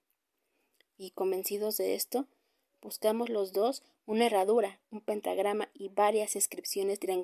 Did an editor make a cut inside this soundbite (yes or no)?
no